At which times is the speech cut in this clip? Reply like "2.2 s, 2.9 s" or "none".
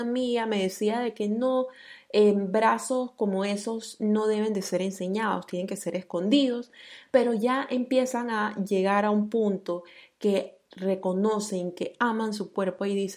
none

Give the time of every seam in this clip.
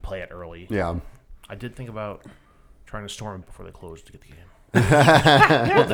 1.4 s, 3.4 s

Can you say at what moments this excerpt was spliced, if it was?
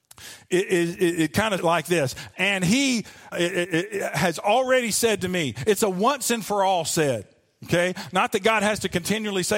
1.6 s, 3.3 s

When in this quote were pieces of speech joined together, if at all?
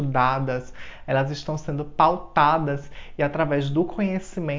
none

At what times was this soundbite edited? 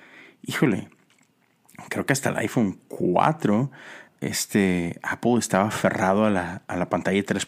4.1 s

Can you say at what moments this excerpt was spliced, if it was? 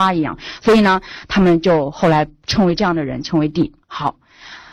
3.8 s

